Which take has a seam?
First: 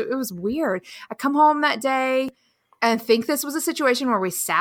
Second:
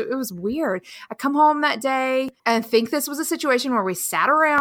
second; 1 cut; at 2.4 s

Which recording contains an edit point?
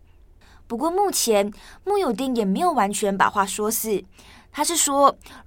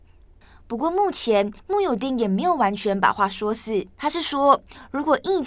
second; 2 cuts; at 1.6 s, 3.9 s

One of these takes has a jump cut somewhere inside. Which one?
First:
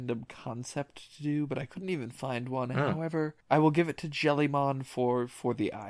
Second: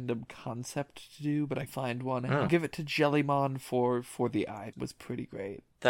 second; 3 cuts; at 1.7 s, 2.5 s, 4.7 s

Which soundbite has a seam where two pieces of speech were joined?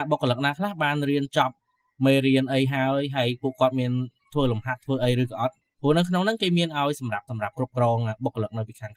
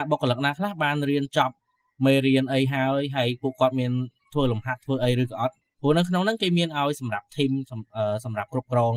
first; 1 cut; at 7.3 s

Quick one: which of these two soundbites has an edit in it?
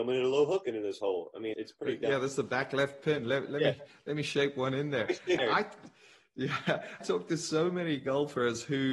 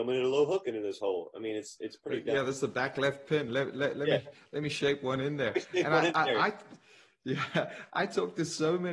first; 4 cuts; at 1.5 s, 3.5 s, 5.4 s, 7.0 s

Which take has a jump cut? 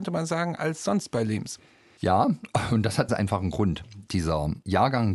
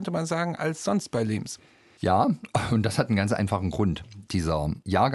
first; 1 cut; at 3.1 s

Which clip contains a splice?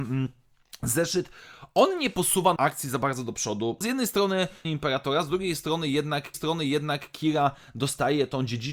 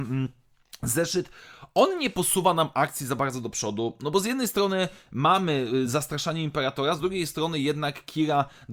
first; 4 cuts; at 2.6 s, 3.8 s, 4.6 s, 6.3 s

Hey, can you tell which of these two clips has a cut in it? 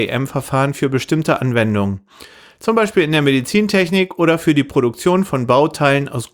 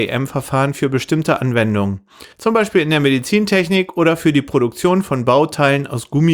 second; 1 cut; at 2.3 s

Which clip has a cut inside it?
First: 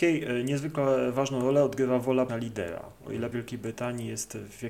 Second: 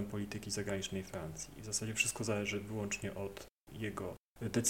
first; 2 cuts; at 2.3 s, 3.3 s

